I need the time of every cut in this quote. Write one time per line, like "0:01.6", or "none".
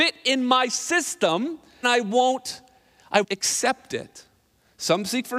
0:01.8
0:03.2